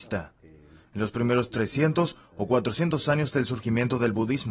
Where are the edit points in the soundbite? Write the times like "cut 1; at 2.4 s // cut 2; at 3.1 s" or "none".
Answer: none